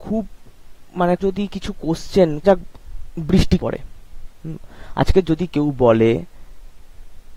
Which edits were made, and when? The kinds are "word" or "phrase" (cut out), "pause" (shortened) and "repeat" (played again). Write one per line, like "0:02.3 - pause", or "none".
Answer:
0:01.2 - word
0:02.4 - phrase
0:03.6 - word

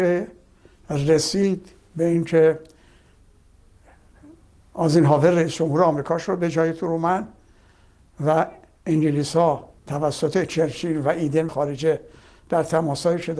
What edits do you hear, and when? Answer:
0:09.8 - pause
0:11.5 - word

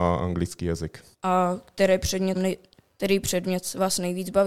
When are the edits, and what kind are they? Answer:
0:01.1 - pause
0:02.4 - word

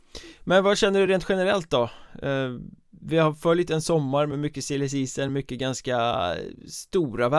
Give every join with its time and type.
none

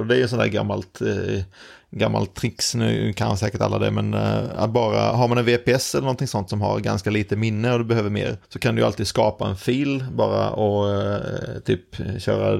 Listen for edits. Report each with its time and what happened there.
0:08.4 - pause

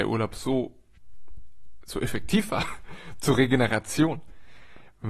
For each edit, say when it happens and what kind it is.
none

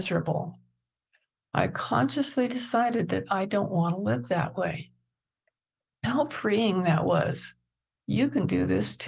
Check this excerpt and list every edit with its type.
none

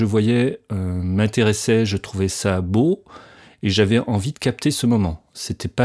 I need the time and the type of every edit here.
none

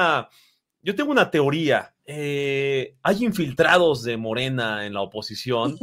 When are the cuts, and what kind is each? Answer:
0:02.0 - pause

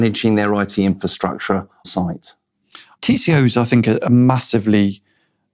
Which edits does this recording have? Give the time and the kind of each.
0:01.8 - word

